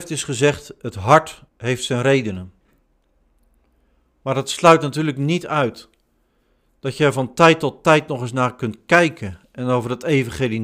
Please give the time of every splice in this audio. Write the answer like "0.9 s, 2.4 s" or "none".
1.5 s